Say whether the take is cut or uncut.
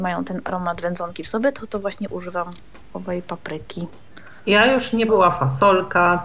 cut